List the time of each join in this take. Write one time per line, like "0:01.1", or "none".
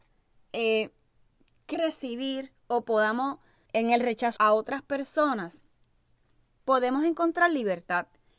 0:01.7
0:03.7
0:04.4

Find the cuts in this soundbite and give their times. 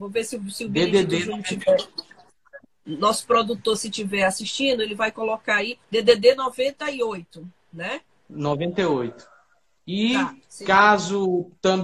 0:02.6
0:05.8
0:08.1
0:10.4

